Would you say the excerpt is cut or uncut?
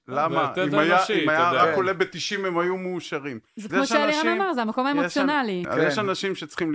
cut